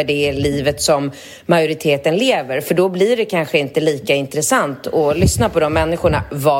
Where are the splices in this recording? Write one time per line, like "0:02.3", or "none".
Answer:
none